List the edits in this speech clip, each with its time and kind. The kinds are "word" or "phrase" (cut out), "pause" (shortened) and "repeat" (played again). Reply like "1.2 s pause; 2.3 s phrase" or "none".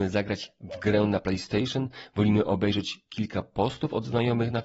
none